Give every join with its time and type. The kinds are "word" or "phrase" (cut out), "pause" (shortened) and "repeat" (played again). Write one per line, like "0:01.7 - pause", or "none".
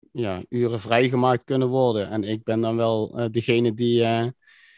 none